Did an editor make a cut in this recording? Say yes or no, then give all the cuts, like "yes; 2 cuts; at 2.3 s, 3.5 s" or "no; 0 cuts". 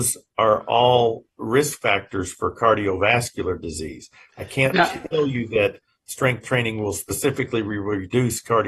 no; 0 cuts